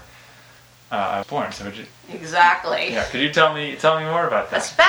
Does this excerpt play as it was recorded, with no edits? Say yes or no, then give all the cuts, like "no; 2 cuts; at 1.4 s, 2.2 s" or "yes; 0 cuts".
no; 1 cut; at 1.2 s